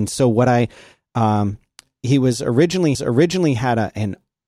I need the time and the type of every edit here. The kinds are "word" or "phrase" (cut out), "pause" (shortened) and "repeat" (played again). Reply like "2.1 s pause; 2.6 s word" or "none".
2.9 s repeat